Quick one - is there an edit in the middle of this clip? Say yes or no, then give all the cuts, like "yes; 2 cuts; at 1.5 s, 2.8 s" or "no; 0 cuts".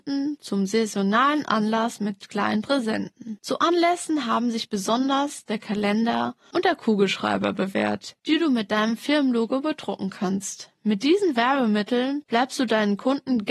no; 0 cuts